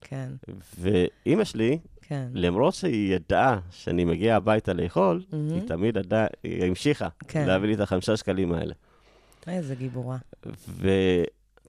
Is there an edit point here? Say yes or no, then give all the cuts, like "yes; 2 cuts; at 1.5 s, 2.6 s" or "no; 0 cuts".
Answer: no; 0 cuts